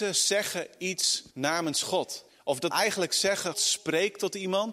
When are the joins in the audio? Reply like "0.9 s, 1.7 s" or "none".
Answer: 1.3 s, 2.3 s, 2.7 s, 3.5 s